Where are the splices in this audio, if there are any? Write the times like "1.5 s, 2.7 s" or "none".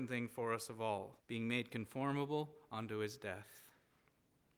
1.2 s